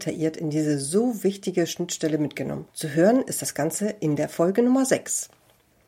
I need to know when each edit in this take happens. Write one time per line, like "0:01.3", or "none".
0:02.7